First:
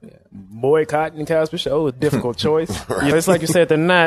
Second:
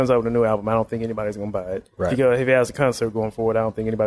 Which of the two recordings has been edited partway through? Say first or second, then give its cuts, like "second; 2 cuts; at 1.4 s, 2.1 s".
first; 2 cuts; at 1.9 s, 3.1 s